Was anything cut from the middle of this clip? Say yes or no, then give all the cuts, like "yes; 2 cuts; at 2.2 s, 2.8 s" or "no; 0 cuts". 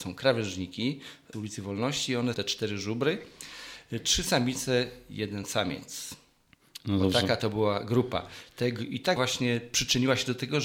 yes; 3 cuts; at 1.3 s, 2.3 s, 9.2 s